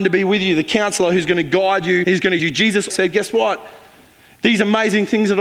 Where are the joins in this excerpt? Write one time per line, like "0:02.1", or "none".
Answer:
0:02.0
0:02.4
0:02.9

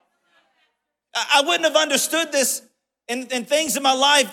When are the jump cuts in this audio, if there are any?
none

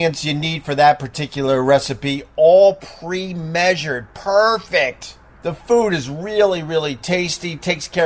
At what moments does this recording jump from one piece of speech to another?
none

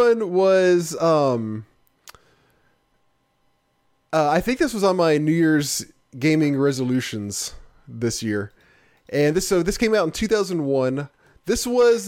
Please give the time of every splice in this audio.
none

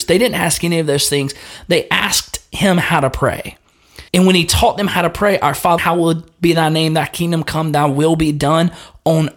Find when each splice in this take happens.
0:04.1
0:05.8

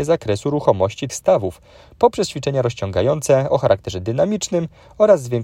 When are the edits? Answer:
0:01.1

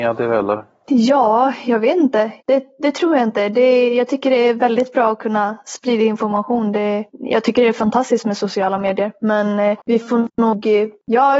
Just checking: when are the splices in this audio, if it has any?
0:02.4

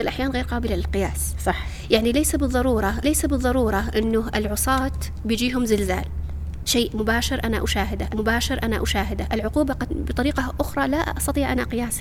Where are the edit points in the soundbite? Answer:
0:03.0
0:08.1
0:09.9

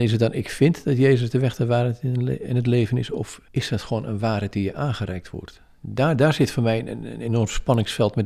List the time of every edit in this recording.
0:03.5

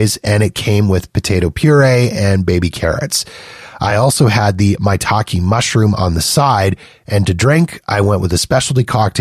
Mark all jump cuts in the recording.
none

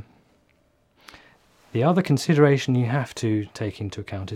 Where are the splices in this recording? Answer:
none

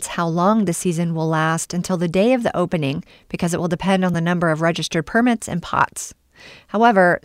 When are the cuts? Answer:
none

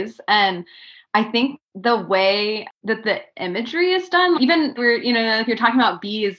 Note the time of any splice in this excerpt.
0:01.7
0:04.3
0:04.8

